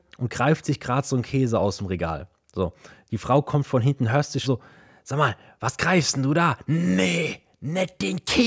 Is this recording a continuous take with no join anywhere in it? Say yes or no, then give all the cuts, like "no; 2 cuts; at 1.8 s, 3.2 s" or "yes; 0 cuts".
no; 1 cut; at 4.4 s